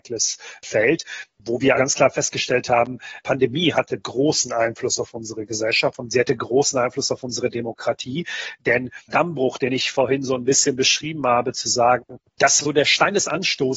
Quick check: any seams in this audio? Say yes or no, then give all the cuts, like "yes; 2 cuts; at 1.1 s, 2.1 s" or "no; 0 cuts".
yes; 4 cuts; at 1.8 s, 3.2 s, 9.1 s, 12.6 s